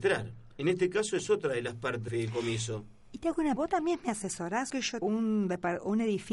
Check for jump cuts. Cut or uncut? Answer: cut